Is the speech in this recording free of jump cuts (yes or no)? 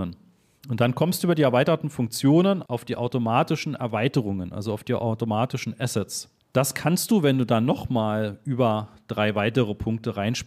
no